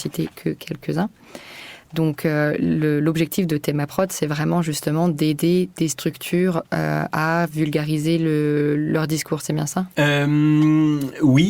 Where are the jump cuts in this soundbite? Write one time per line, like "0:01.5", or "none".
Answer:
0:06.7
0:09.9